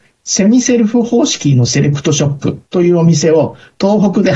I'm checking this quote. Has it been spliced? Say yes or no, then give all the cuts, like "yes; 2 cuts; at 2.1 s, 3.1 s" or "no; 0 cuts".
yes; 1 cut; at 2.7 s